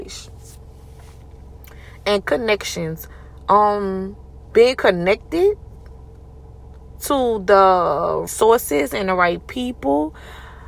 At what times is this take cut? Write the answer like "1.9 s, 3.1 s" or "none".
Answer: 8.3 s